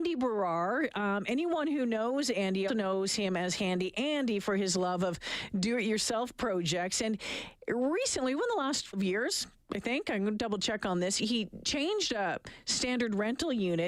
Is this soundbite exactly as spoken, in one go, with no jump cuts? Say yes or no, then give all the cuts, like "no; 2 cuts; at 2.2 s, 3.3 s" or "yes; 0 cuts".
no; 3 cuts; at 2.7 s, 8.9 s, 11.2 s